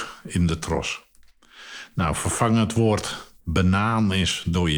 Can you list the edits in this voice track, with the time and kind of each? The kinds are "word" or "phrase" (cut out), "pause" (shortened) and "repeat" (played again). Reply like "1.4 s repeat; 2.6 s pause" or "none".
3.4 s pause